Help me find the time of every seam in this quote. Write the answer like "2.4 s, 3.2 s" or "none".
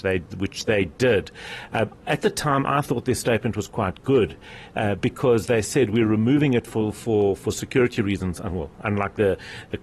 none